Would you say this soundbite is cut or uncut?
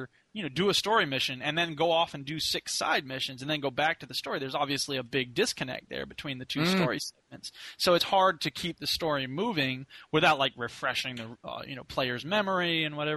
uncut